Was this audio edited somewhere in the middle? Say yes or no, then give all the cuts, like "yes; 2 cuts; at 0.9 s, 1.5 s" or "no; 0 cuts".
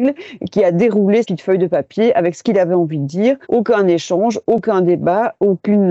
yes; 2 cuts; at 1.2 s, 3.4 s